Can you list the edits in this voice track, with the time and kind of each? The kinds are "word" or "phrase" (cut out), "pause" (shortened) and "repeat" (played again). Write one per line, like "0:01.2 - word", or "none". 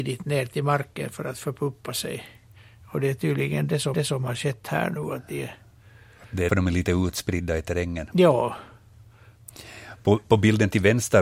0:03.9 - repeat
0:06.5 - word